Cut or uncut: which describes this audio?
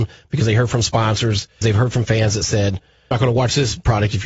cut